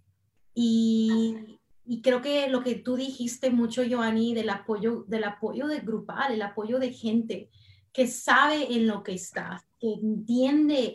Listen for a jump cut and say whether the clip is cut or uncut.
uncut